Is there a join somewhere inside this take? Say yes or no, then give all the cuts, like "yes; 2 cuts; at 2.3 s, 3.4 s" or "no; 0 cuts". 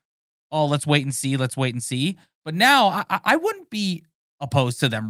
no; 0 cuts